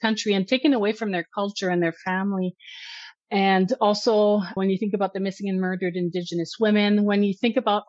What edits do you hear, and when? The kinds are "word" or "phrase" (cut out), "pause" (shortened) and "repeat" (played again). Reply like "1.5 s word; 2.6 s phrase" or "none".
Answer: 4.6 s word